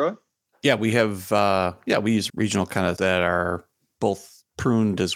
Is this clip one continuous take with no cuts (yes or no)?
no